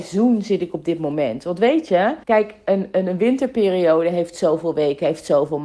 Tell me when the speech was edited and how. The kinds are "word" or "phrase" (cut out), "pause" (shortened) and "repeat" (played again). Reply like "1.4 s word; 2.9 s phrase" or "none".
2.2 s pause